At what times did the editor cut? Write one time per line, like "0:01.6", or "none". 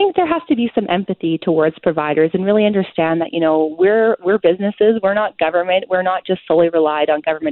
none